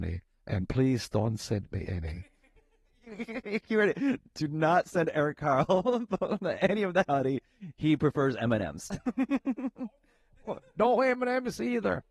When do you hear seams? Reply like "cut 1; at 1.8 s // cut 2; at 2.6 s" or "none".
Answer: none